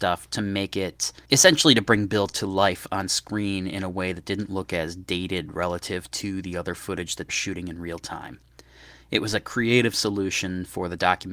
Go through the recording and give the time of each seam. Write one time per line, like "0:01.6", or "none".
0:01.2
0:07.3